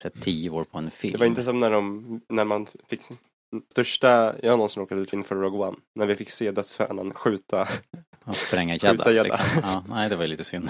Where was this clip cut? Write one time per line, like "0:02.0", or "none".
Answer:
0:02.3
0:03.7
0:05.1